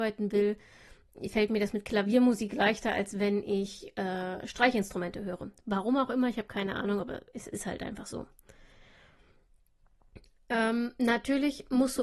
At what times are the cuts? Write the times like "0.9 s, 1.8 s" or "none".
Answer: none